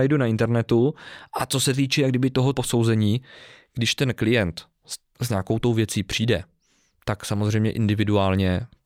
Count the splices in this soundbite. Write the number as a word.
two